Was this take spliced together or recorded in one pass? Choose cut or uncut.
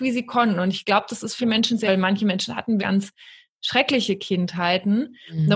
cut